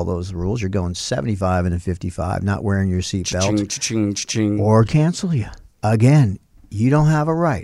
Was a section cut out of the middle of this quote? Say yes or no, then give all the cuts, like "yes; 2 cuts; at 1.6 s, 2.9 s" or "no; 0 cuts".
yes; 1 cut; at 4.9 s